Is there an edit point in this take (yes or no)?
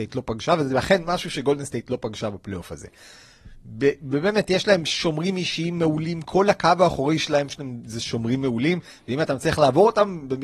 no